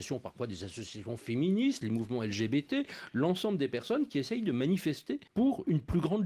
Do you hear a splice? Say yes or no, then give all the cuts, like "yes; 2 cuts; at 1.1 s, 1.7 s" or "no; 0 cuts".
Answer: yes; 1 cut; at 5.3 s